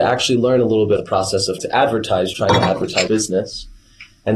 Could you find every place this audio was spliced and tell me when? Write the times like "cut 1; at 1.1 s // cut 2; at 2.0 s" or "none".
cut 1; at 1.0 s // cut 2; at 1.6 s // cut 3; at 2.3 s // cut 4; at 3.1 s